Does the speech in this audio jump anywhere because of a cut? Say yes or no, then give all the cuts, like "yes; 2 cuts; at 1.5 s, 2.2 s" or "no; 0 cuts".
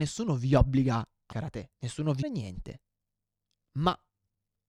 yes; 3 cuts; at 1.3 s, 1.7 s, 2.2 s